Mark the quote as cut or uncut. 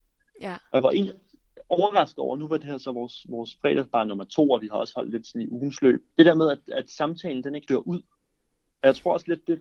cut